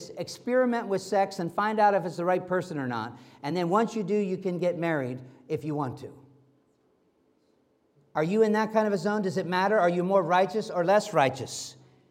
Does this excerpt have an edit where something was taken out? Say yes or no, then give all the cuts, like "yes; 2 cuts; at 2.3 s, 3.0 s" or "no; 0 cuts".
no; 0 cuts